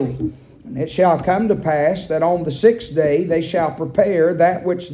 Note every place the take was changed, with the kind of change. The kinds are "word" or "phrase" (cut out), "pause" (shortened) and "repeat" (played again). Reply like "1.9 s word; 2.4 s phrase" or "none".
none